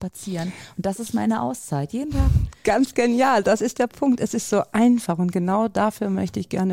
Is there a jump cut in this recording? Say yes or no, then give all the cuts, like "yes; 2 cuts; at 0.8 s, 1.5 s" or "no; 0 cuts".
no; 0 cuts